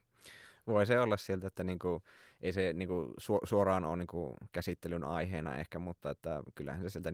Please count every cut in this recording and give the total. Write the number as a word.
zero